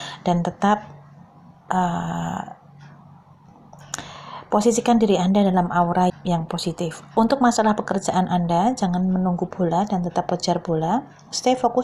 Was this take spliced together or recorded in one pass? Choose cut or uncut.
cut